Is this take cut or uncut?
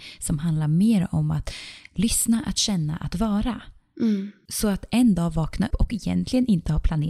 cut